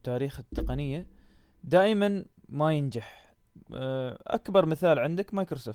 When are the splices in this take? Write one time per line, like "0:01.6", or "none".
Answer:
none